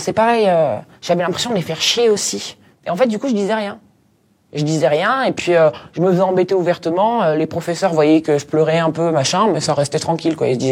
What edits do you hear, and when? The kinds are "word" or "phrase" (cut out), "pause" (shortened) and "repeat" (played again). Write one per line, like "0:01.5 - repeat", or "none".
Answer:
none